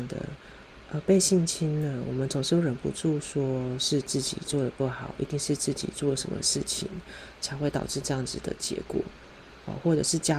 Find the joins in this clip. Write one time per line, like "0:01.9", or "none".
none